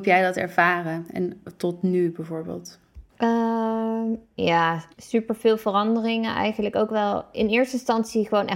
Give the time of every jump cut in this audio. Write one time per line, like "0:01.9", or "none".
0:03.1
0:04.9